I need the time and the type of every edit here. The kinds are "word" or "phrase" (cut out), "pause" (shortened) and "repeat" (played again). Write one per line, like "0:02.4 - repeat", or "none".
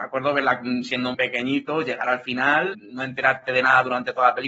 0:01.1 - word
0:02.7 - word